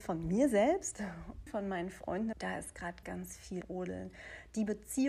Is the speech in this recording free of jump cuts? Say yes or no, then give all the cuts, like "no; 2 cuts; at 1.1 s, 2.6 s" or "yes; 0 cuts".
no; 4 cuts; at 1.5 s, 2.3 s, 3.0 s, 3.6 s